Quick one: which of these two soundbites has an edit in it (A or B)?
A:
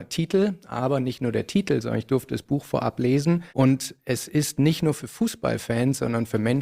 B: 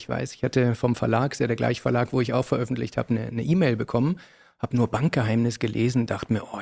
A